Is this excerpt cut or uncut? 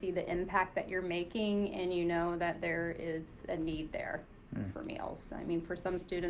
uncut